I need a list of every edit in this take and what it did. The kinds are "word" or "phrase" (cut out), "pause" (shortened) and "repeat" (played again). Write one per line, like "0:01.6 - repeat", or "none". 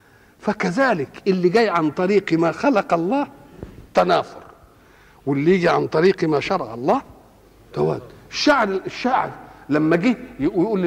none